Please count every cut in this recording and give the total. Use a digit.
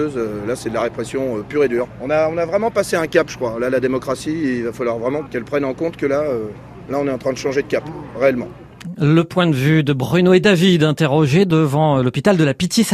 0